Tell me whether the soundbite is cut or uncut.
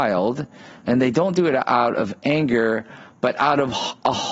uncut